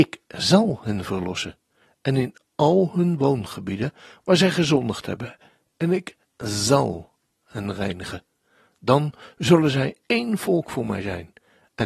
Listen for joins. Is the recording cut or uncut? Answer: uncut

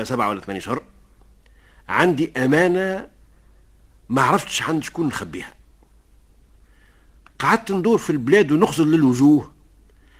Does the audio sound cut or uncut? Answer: uncut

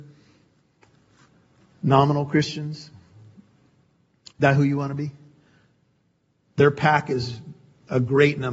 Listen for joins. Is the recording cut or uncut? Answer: uncut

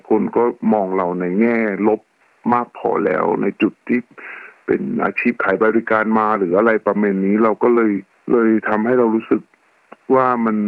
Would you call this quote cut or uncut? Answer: cut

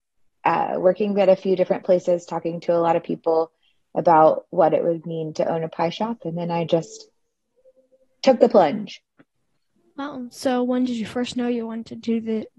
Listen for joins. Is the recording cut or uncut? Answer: uncut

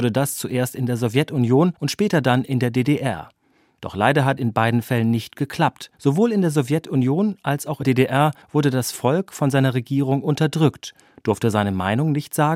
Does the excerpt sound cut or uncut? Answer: cut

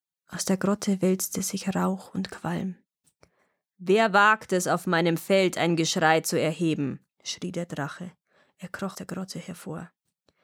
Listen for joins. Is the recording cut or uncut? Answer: cut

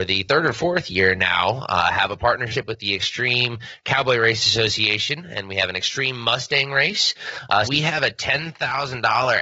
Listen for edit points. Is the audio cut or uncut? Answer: cut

